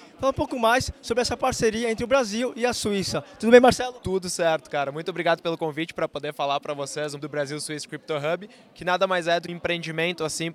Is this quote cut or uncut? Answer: cut